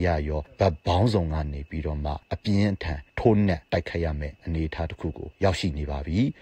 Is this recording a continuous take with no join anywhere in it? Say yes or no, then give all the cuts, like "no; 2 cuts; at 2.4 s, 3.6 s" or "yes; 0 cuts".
yes; 0 cuts